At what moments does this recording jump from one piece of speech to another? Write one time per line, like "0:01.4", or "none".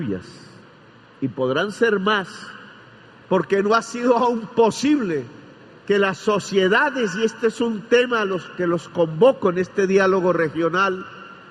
none